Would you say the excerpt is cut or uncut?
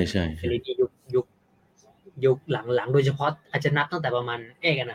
uncut